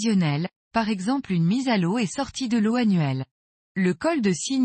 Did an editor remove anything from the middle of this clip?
yes; 1 cut; at 3.5 s

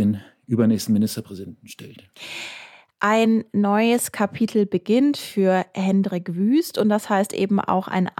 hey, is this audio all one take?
yes; 0 cuts

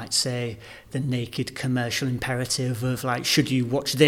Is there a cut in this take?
no; 0 cuts

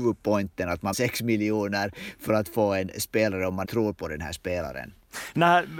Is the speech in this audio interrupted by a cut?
yes; 2 cuts; at 0.9 s, 3.6 s

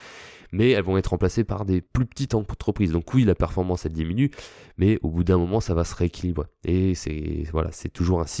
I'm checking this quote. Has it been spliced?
yes; 1 cut; at 1.9 s

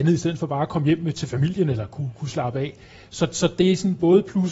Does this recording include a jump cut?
no; 0 cuts

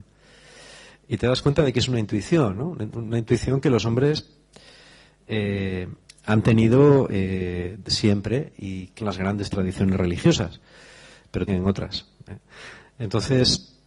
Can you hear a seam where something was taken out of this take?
yes; 3 cuts; at 6.1 s, 9.0 s, 11.5 s

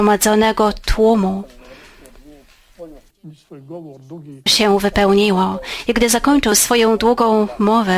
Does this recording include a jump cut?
yes; 1 cut; at 4.5 s

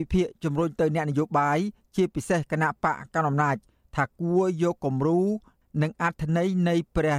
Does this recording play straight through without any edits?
yes; 0 cuts

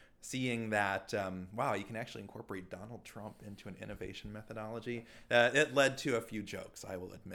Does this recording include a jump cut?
no; 0 cuts

